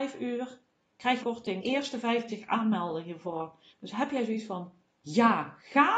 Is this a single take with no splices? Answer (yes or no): no